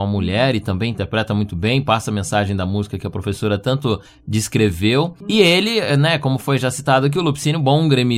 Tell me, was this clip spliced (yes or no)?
no